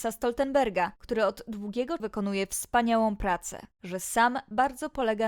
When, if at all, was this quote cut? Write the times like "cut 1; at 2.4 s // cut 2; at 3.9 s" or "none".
cut 1; at 2.0 s // cut 2; at 3.7 s

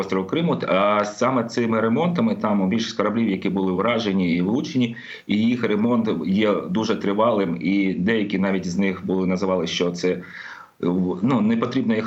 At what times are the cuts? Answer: none

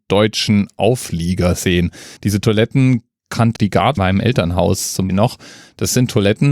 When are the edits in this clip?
cut 1; at 2.2 s // cut 2; at 3.6 s // cut 3; at 4.0 s // cut 4; at 5.1 s

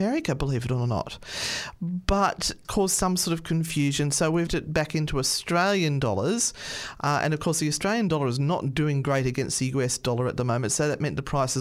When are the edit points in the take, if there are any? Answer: cut 1; at 2.6 s // cut 2; at 4.5 s

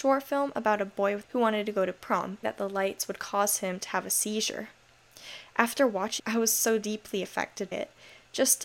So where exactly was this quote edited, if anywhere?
cut 1; at 1.2 s // cut 2; at 2.4 s // cut 3; at 6.2 s // cut 4; at 7.7 s

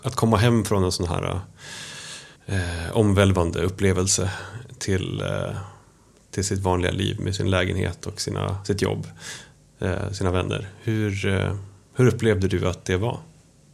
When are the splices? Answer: cut 1; at 2.4 s

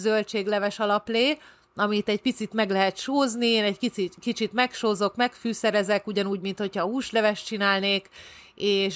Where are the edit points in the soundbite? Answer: none

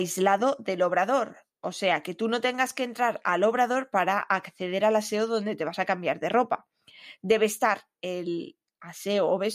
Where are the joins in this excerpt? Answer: none

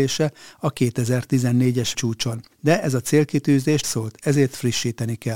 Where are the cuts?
cut 1; at 1.9 s // cut 2; at 2.5 s // cut 3; at 3.8 s

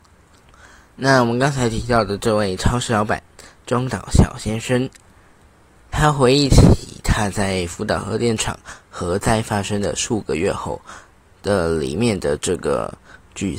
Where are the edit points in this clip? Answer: none

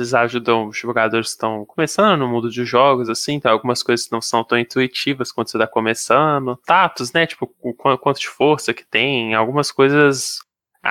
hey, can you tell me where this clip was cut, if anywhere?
none

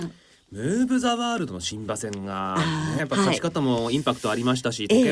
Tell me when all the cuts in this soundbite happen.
cut 1; at 3.0 s

